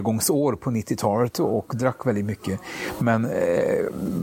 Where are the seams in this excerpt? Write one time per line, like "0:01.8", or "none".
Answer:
none